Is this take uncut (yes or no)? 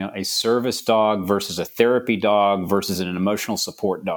yes